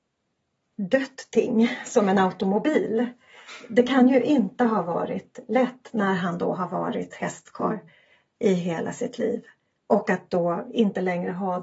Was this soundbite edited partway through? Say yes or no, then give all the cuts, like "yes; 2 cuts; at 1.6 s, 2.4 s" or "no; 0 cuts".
no; 0 cuts